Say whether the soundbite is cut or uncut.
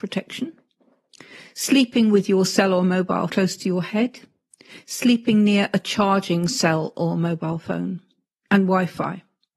cut